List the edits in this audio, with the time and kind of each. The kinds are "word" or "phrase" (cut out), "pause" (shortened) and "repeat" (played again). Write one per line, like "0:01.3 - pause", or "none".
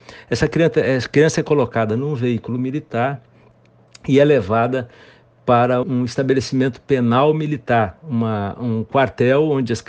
0:05.8 - word

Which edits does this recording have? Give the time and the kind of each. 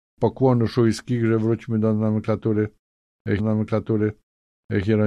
0:03.4 - repeat

